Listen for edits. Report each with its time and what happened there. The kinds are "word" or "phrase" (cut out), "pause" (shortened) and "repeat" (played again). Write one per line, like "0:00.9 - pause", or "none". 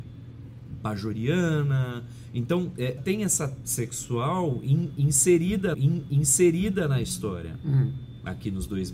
0:03.0 - phrase
0:03.6 - word
0:05.7 - repeat